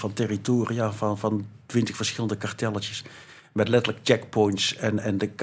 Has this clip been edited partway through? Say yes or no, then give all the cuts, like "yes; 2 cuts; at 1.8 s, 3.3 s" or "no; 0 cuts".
no; 0 cuts